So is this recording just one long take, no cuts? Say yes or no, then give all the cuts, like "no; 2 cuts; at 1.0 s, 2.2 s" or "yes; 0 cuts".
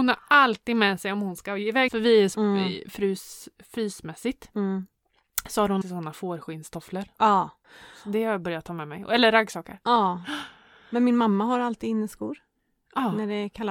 no; 3 cuts; at 1.9 s, 2.3 s, 5.8 s